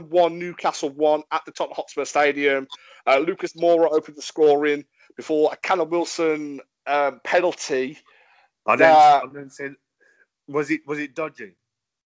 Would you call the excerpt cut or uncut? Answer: uncut